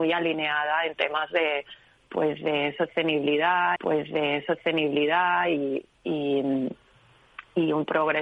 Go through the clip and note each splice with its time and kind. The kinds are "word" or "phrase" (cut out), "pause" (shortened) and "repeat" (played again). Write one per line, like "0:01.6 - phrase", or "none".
0:03.8 - repeat